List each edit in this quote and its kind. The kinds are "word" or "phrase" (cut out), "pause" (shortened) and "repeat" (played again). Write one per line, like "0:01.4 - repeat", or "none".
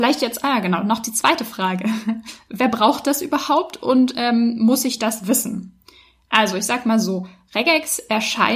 none